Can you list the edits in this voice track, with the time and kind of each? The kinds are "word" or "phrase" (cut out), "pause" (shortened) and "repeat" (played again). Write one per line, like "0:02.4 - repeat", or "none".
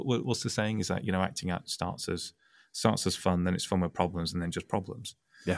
none